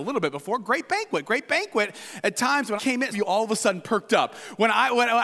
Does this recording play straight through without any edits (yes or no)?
no